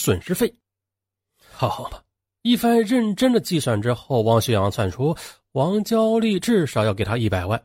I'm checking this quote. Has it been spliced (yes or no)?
no